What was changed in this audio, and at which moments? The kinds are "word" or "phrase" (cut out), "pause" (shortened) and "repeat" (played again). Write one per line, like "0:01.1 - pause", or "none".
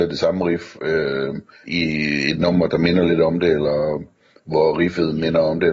0:01.6 - word